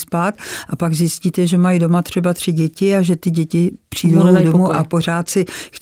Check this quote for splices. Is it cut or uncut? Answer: uncut